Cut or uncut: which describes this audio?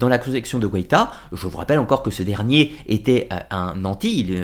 uncut